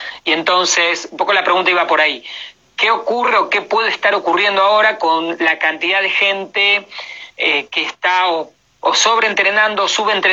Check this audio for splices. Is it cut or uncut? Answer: uncut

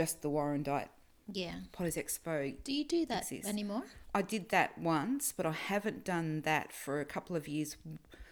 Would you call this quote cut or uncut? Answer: uncut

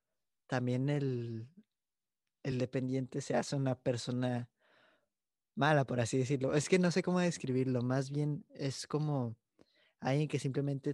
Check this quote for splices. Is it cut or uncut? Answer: uncut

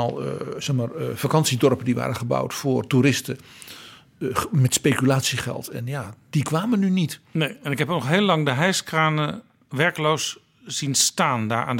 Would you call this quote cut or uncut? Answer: uncut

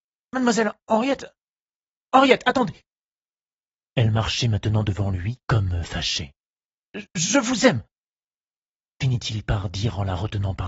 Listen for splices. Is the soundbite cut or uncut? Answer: uncut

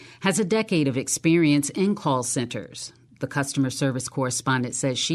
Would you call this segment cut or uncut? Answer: uncut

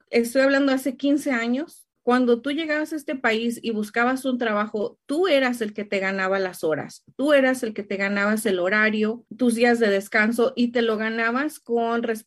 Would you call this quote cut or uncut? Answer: cut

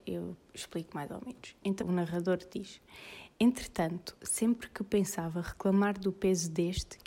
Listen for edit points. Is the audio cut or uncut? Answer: cut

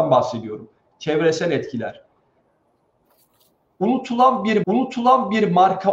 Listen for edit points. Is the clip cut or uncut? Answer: cut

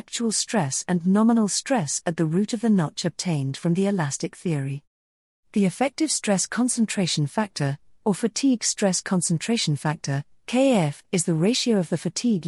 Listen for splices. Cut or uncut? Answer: uncut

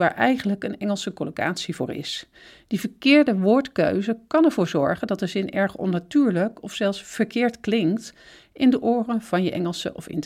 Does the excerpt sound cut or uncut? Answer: uncut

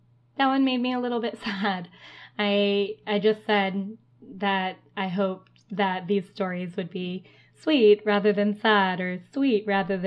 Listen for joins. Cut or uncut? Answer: uncut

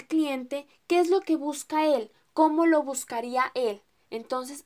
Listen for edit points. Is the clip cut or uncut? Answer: uncut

